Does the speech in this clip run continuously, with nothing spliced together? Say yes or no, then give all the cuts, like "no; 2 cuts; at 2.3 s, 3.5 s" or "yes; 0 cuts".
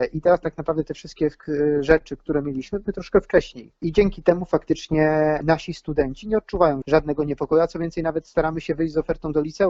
no; 1 cut; at 2.8 s